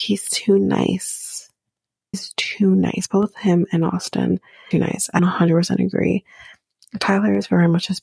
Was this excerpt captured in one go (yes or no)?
no